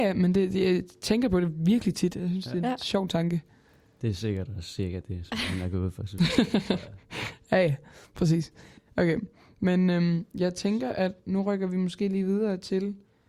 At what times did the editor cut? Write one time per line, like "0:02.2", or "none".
none